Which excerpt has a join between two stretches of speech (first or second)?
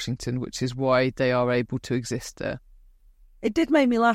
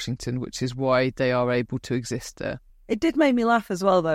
second